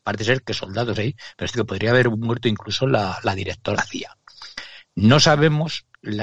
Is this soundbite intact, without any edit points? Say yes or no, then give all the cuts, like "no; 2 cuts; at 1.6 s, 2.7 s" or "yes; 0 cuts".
no; 3 cuts; at 0.9 s, 1.5 s, 3.7 s